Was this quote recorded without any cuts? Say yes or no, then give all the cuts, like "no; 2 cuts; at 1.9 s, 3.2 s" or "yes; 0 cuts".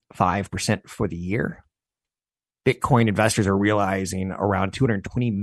yes; 0 cuts